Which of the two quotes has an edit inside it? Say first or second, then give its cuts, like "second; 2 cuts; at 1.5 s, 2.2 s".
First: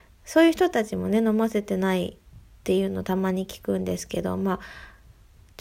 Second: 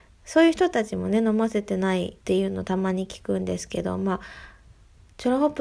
second; 1 cut; at 2.2 s